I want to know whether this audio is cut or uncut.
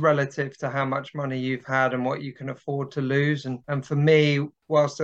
cut